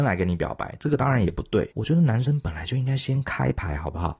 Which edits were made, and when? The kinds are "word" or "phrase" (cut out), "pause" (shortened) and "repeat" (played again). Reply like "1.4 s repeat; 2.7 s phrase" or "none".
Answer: 1.7 s pause